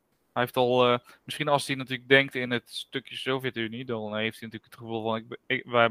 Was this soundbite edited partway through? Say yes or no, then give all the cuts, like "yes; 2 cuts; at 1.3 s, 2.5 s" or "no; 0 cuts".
no; 0 cuts